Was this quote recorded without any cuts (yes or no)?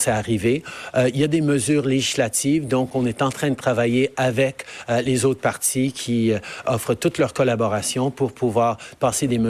yes